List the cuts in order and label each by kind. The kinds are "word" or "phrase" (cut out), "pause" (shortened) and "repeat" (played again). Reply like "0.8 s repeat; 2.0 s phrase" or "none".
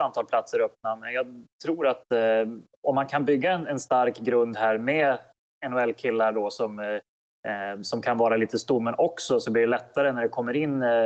none

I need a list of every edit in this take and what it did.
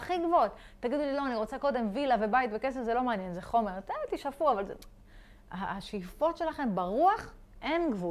none

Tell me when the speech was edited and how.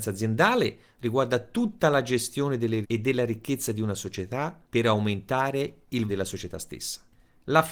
2.8 s word; 4.6 s pause; 6.1 s word

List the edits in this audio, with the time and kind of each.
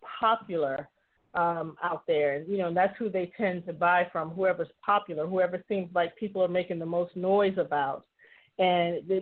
none

